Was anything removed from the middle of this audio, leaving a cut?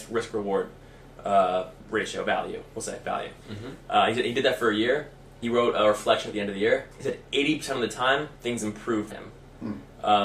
yes; 6 cuts; at 1.8 s, 3.4 s, 5.4 s, 6.9 s, 8.3 s, 9.1 s

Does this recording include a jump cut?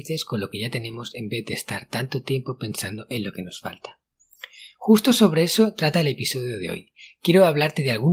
no; 0 cuts

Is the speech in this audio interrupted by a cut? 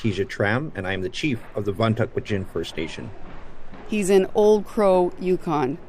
no; 0 cuts

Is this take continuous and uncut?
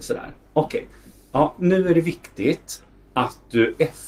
yes; 0 cuts

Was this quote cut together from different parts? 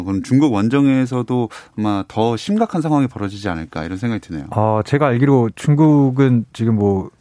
no; 0 cuts

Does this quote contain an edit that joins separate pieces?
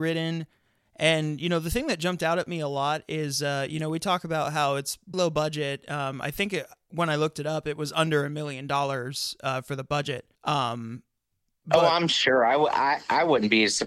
yes; 2 cuts; at 5.1 s, 10.3 s

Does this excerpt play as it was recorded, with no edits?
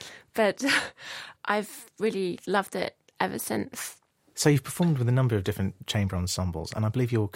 yes; 0 cuts

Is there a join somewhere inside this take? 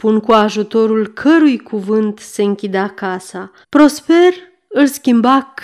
yes; 1 cut; at 3.6 s

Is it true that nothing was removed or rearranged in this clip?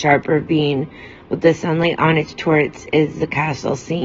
yes; 0 cuts

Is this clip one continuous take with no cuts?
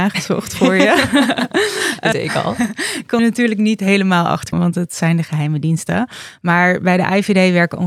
no; 3 cuts; at 2.1 s, 3.2 s, 4.5 s

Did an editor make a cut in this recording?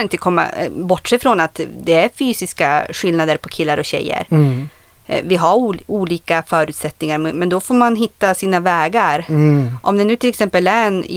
no; 0 cuts

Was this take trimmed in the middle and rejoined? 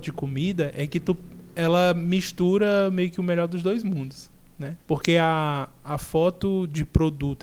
yes; 1 cut; at 4.8 s

